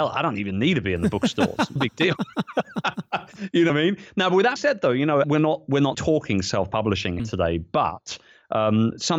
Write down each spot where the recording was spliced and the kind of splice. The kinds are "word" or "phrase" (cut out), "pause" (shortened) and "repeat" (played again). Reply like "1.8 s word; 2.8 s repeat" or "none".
1.8 s word; 3.7 s word; 4.6 s word; 5.2 s word; 5.9 s word; 7.2 s word